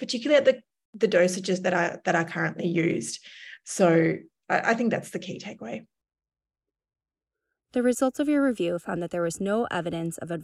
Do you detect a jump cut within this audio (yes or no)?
no